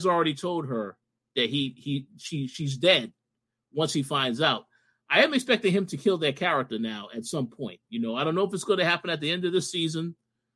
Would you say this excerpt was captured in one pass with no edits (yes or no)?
yes